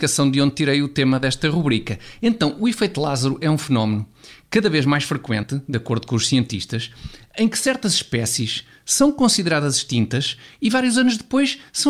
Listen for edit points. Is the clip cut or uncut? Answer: uncut